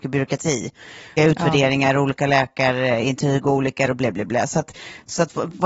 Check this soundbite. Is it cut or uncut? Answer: cut